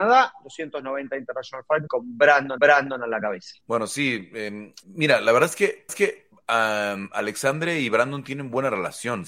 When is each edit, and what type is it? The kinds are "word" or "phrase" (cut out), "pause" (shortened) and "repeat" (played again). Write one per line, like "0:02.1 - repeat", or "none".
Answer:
0:01.9 - word
0:02.6 - repeat
0:03.6 - pause
0:04.8 - pause
0:05.9 - repeat